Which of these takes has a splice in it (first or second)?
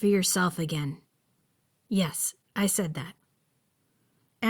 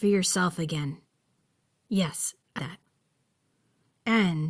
second